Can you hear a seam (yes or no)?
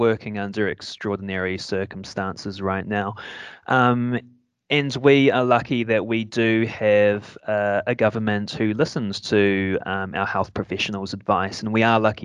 no